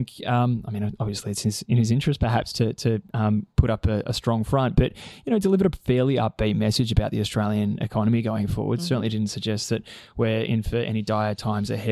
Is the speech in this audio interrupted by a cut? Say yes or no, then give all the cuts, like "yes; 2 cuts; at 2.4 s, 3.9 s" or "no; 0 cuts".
yes; 1 cut; at 3.5 s